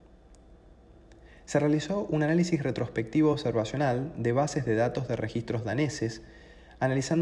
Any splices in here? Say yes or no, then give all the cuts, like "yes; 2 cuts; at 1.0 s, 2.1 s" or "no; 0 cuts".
no; 0 cuts